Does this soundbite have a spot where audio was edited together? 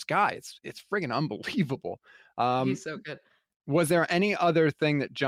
no; 0 cuts

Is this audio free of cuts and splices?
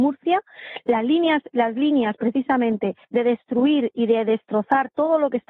no; 1 cut; at 3.0 s

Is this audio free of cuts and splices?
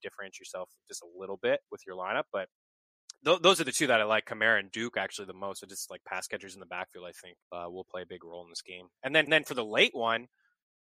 no; 2 cuts; at 7.4 s, 9.3 s

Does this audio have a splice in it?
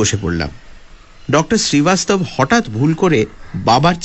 no; 0 cuts

